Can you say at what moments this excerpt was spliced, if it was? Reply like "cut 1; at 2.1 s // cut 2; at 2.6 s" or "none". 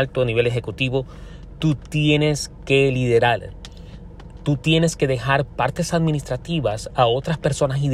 none